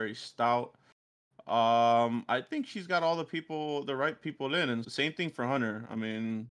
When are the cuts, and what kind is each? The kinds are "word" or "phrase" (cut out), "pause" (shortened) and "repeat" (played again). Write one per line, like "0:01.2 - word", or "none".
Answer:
0:04.8 - word